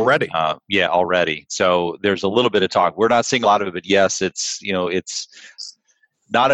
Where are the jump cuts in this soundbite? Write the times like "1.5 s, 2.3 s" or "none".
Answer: 3.4 s